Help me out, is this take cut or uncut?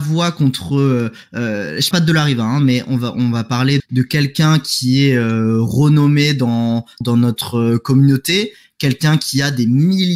cut